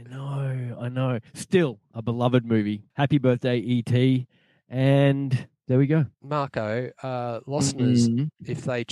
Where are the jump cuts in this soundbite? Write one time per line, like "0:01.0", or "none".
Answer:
0:01.3
0:02.9
0:05.6
0:06.1